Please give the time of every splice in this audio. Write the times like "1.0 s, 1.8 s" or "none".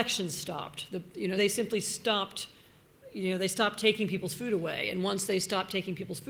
1.4 s